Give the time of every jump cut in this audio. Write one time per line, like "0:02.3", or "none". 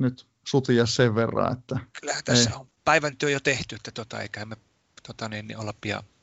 0:01.9
0:02.8